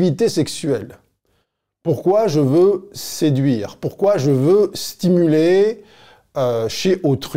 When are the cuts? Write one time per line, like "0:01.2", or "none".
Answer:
none